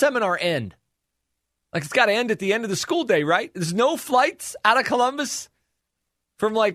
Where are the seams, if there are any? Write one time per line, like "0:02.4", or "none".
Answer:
none